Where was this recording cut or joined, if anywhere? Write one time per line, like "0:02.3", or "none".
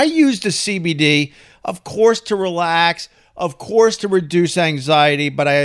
none